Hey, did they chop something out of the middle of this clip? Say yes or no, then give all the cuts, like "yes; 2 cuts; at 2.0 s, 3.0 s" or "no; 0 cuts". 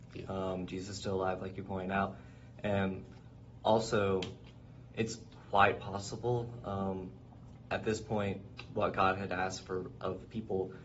no; 0 cuts